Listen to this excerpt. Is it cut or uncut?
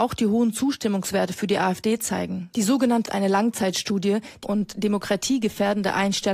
cut